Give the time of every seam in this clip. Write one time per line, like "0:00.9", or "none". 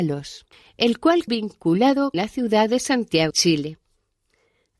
0:01.3
0:02.1
0:03.3